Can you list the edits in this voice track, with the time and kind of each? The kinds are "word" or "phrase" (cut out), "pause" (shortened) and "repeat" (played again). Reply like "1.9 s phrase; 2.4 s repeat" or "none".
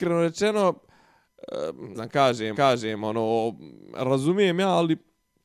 1.9 s word; 2.5 s repeat